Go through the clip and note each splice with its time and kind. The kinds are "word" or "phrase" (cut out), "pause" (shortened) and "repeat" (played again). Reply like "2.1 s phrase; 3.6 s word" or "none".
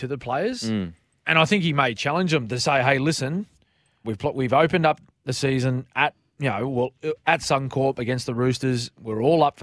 4.0 s word